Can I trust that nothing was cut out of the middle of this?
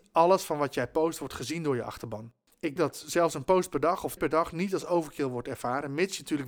no; 2 cuts; at 2.8 s, 4.2 s

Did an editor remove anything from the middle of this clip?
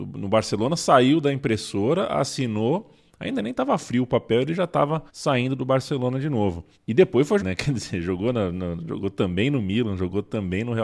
yes; 3 cuts; at 5.1 s, 6.7 s, 7.4 s

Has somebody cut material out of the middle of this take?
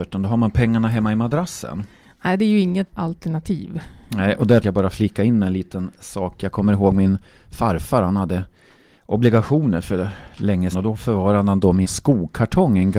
yes; 4 cuts; at 2.9 s, 4.6 s, 10.7 s, 11.8 s

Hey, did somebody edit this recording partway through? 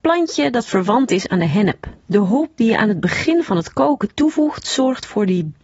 yes; 1 cut; at 2.0 s

